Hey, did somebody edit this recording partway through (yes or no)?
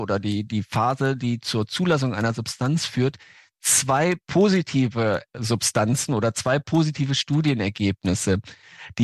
no